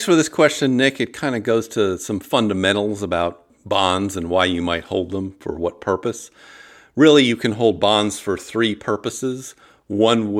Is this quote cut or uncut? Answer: uncut